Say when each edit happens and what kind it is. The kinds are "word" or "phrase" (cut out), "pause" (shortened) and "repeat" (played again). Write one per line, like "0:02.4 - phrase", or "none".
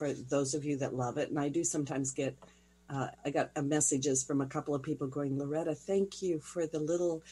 0:03.1 - pause